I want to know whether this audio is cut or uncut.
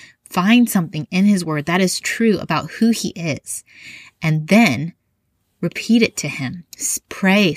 uncut